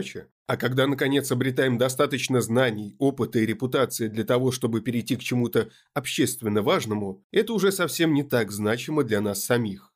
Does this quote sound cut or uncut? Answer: uncut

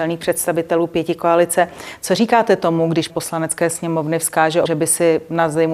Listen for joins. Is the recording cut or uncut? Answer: cut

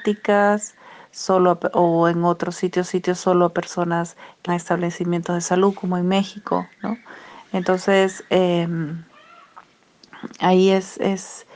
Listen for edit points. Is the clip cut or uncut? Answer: cut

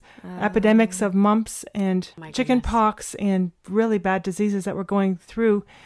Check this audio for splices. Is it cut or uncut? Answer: cut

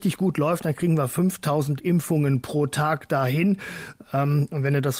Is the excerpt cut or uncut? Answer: uncut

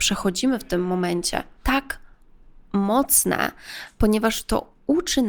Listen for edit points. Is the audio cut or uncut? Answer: uncut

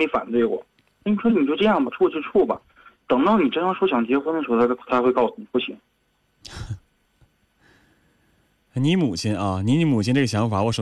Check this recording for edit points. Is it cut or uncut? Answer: uncut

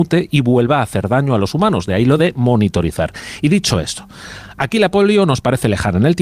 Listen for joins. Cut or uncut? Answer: uncut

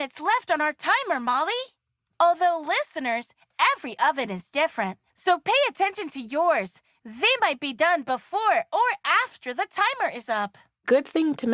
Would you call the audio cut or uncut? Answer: uncut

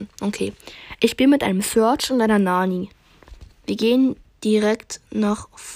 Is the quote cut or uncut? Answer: uncut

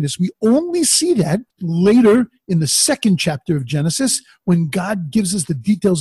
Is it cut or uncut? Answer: cut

